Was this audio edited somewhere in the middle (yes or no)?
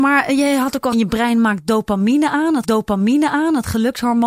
yes